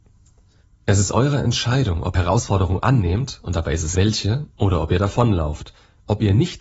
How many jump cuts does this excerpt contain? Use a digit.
2